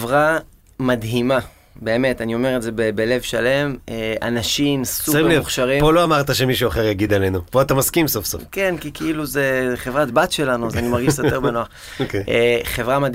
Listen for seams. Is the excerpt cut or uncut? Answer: uncut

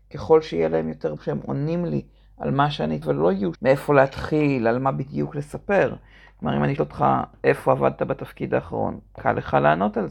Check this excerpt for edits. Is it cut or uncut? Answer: cut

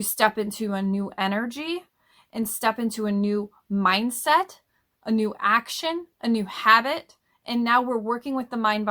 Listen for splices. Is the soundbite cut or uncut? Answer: uncut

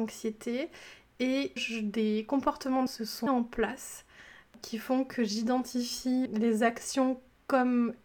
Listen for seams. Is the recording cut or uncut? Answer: cut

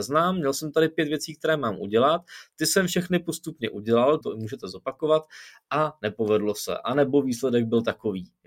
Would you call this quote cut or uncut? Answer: cut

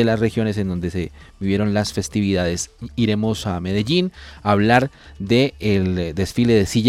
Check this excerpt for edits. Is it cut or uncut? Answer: uncut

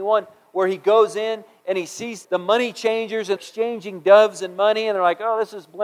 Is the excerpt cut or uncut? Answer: cut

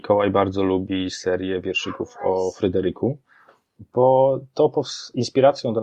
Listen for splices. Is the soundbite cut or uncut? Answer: uncut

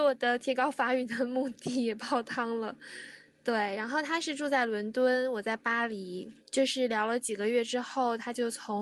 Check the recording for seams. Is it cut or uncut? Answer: cut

